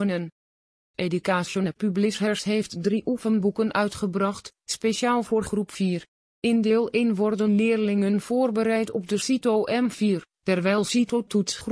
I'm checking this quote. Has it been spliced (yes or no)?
no